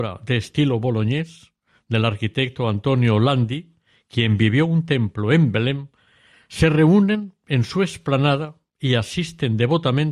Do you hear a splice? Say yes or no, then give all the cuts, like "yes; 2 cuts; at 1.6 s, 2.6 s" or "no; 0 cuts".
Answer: no; 0 cuts